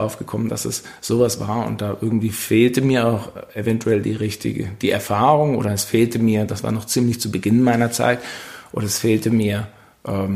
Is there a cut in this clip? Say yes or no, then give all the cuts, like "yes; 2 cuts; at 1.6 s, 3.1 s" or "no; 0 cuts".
no; 0 cuts